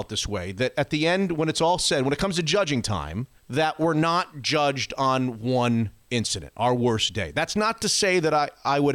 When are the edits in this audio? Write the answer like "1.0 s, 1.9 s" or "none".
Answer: 3.4 s